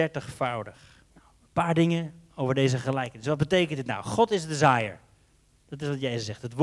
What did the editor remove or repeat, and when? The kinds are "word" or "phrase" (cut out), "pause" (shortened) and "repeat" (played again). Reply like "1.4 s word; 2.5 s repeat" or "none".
1.1 s pause